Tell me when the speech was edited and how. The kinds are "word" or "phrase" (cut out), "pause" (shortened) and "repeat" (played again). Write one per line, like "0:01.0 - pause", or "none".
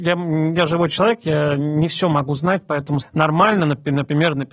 0:03.0 - word